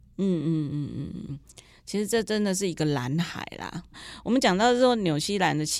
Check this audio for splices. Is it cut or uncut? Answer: uncut